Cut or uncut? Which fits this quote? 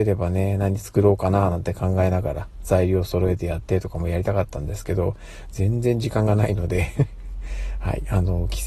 uncut